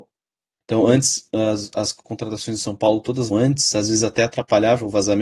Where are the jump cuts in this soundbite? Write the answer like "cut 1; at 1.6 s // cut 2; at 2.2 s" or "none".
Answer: cut 1; at 3.3 s